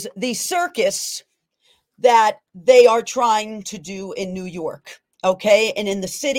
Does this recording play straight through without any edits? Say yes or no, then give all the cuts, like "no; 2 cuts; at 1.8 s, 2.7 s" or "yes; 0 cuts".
yes; 0 cuts